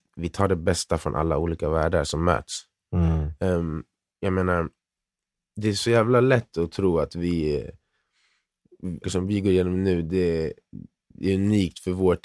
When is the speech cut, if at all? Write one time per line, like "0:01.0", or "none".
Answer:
0:09.0